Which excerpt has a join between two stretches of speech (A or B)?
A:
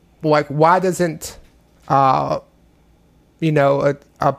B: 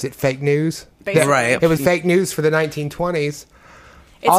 B